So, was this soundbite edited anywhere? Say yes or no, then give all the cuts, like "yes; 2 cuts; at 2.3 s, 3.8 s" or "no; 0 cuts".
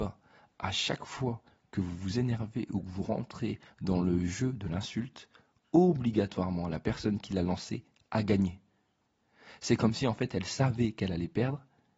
no; 0 cuts